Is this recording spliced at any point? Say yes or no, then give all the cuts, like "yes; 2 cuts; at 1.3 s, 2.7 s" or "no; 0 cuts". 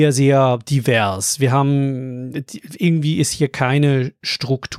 no; 0 cuts